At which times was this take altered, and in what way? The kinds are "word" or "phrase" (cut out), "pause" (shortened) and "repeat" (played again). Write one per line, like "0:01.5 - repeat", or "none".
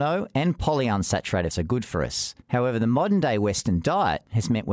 0:01.5 - word
0:02.4 - pause